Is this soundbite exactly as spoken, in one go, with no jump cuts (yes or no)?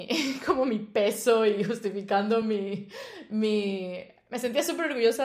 yes